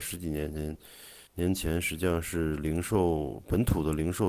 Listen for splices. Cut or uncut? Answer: cut